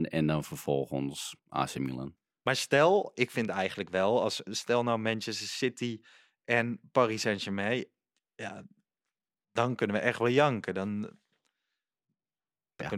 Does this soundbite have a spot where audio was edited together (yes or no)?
yes